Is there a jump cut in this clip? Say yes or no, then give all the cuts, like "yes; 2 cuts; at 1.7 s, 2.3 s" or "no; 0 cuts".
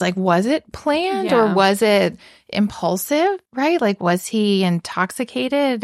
yes; 1 cut; at 3.4 s